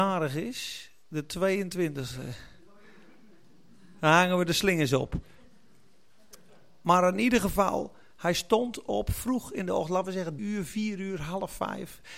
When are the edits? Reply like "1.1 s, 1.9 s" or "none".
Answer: 10.4 s